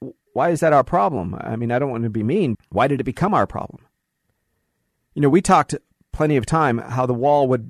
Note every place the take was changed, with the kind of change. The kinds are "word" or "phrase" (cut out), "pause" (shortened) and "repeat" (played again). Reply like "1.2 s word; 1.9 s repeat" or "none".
2.5 s word